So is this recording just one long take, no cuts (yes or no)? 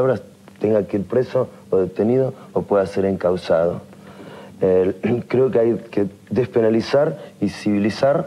yes